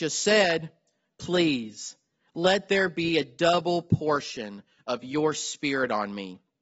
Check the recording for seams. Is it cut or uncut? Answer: uncut